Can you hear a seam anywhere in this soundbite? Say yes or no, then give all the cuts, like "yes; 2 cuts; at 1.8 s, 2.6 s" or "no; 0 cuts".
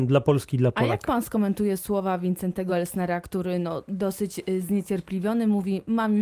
no; 0 cuts